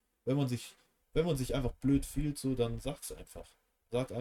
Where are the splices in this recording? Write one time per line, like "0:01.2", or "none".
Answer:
none